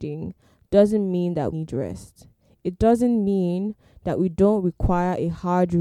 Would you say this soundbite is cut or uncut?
cut